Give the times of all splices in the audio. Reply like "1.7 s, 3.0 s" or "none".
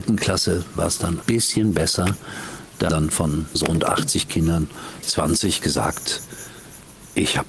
1.2 s, 2.9 s, 3.5 s, 5.0 s